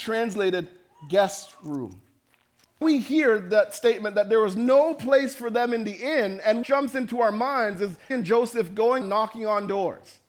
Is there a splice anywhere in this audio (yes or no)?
yes